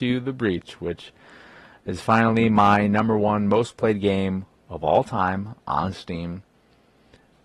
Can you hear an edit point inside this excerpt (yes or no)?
no